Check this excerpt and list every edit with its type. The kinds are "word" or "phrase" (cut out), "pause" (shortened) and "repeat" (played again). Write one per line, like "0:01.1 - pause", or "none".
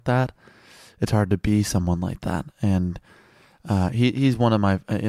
none